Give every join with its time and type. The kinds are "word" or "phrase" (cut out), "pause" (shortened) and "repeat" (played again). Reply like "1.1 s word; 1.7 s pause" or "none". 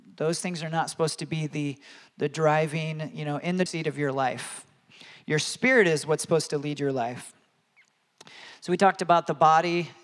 3.7 s word

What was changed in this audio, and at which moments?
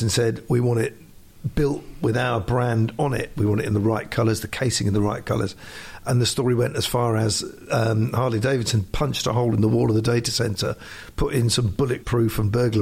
none

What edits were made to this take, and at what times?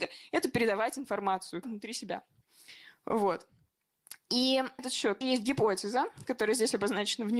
1.6 s word; 4.8 s word; 5.2 s word

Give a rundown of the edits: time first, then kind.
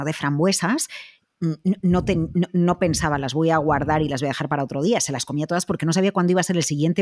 none

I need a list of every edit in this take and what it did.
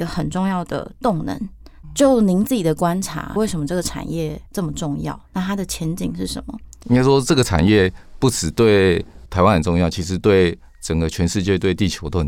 4.5 s pause

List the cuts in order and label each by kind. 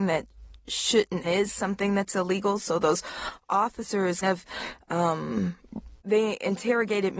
1.2 s phrase; 4.2 s word; 6.0 s pause

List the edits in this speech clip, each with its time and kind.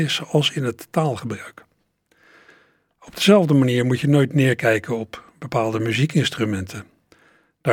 none

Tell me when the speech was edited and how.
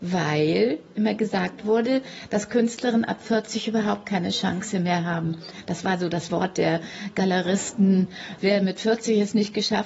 none

